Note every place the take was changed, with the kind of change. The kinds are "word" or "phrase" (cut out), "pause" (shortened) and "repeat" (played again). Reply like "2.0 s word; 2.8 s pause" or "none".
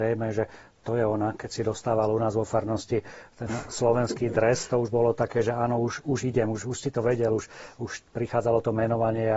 none